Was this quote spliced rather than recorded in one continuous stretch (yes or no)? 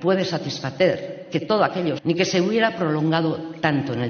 yes